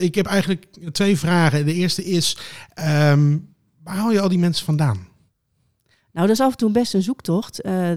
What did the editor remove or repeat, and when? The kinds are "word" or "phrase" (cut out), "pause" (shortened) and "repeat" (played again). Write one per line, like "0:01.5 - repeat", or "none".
none

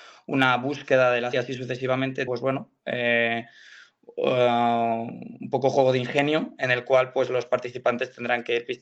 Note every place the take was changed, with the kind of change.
0:01.3 - word
0:02.3 - word

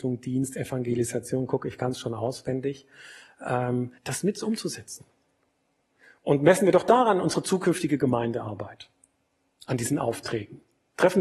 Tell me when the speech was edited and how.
0:04.0 - pause

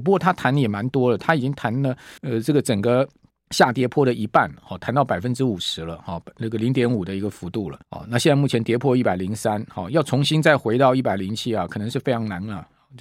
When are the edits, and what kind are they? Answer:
0:02.2 - pause
0:03.3 - pause
0:07.8 - pause

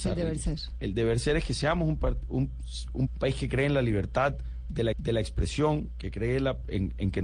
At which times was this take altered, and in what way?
0:03.1 - phrase
0:04.9 - repeat

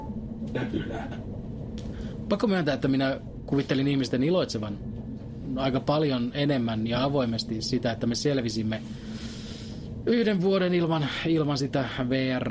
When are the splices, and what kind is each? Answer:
none

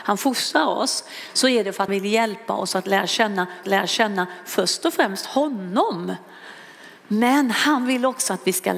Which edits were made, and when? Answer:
0:01.9 - word
0:03.6 - repeat
0:07.0 - pause

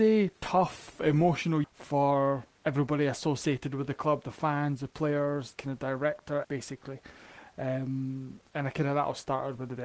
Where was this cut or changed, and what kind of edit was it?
0:01.6 - word
0:05.5 - word
0:06.4 - word

